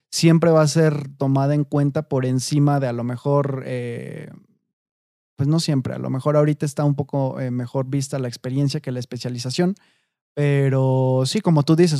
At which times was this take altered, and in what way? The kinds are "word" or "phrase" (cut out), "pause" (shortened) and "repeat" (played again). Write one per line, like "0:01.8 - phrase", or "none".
none